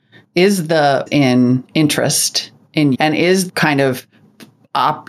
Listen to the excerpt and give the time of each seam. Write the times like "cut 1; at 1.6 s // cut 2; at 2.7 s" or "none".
cut 1; at 1.1 s // cut 2; at 2.9 s // cut 3; at 3.5 s